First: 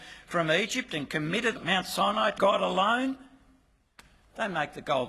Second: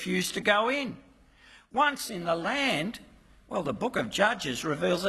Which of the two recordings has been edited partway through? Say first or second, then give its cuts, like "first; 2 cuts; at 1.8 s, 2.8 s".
first; 2 cuts; at 1.6 s, 2.4 s